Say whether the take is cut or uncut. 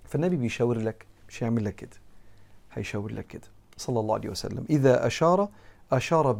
cut